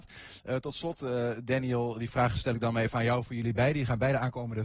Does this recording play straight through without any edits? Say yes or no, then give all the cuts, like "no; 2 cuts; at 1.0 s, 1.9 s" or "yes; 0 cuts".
yes; 0 cuts